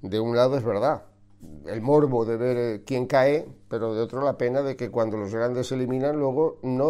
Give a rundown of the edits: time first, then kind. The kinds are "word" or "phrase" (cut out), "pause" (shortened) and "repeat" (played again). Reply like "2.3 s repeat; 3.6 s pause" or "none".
none